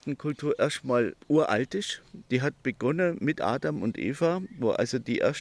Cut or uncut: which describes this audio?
cut